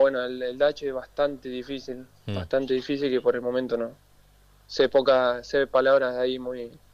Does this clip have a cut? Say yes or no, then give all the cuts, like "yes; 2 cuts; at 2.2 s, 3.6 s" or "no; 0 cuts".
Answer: no; 0 cuts